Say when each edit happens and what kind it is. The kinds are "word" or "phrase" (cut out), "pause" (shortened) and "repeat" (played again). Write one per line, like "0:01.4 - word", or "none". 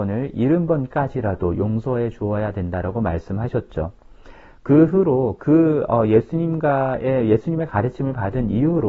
none